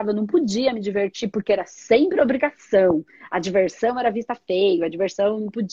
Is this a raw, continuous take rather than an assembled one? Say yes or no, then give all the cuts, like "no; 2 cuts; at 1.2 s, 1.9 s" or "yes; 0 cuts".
yes; 0 cuts